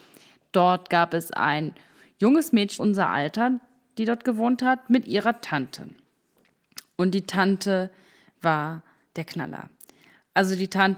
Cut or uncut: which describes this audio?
cut